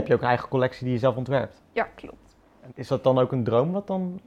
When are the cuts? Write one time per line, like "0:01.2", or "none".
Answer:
0:02.7